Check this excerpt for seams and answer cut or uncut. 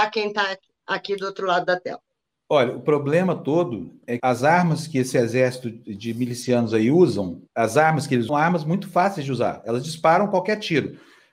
cut